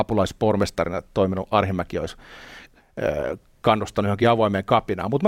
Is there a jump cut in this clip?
no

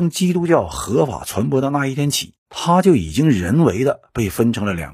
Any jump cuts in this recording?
yes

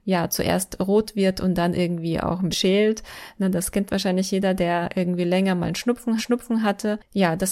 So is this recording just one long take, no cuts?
no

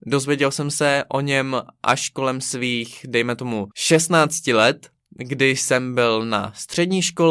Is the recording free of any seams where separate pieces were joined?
no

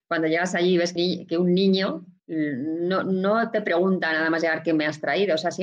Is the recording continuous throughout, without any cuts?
no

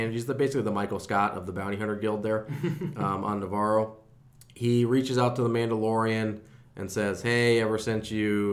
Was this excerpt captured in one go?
no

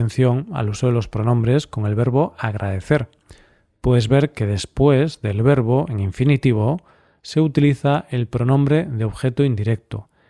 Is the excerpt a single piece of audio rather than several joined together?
yes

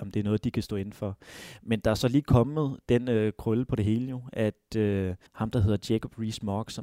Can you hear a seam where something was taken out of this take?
yes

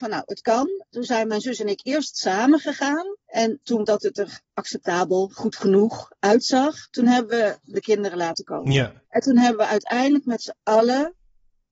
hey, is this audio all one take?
no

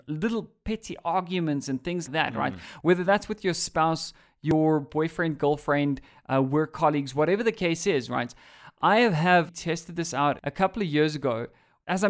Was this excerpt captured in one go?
no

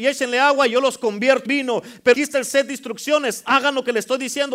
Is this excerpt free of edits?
no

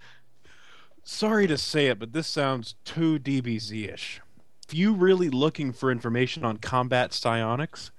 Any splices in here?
yes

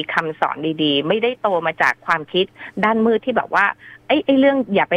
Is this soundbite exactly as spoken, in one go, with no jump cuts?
yes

